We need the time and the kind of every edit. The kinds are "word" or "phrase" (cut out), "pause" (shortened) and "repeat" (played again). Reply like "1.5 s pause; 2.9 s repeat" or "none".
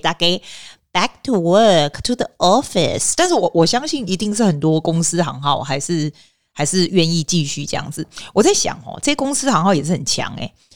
none